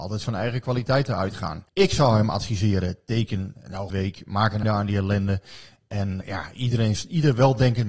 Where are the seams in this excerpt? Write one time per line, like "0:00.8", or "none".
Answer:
0:01.7
0:03.9
0:04.6
0:06.2